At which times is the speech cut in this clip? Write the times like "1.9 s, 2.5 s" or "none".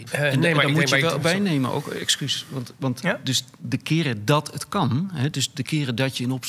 none